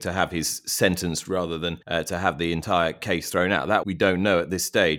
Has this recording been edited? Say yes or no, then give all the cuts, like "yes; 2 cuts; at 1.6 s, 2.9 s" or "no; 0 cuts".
yes; 3 cuts; at 1.2 s, 1.8 s, 3.8 s